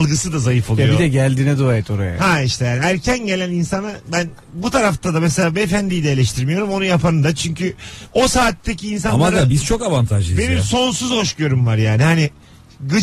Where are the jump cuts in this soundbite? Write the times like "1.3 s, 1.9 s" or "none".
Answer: 4.4 s